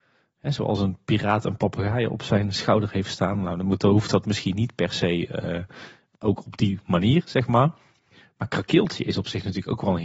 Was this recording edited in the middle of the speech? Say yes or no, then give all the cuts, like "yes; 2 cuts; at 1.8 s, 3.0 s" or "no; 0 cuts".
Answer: no; 0 cuts